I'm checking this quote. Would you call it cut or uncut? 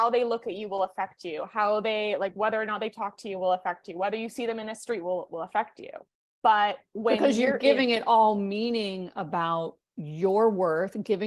cut